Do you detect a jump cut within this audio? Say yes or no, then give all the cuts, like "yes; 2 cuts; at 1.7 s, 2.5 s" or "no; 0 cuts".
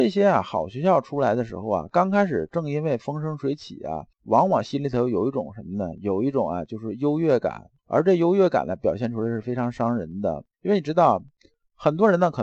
yes; 3 cuts; at 4.1 s, 7.8 s, 10.5 s